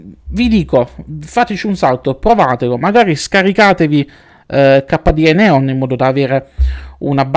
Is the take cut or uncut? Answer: uncut